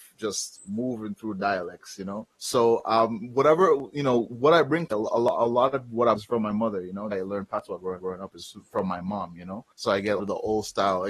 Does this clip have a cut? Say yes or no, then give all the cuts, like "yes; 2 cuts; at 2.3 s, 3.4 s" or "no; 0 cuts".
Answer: yes; 7 cuts; at 2.3 s, 4.9 s, 6.1 s, 7.1 s, 8.0 s, 9.7 s, 10.2 s